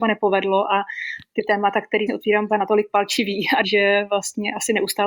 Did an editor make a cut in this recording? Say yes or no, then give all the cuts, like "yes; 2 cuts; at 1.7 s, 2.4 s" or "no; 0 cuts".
yes; 3 cuts; at 2.1 s, 2.5 s, 3.6 s